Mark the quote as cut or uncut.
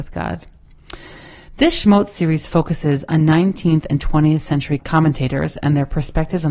cut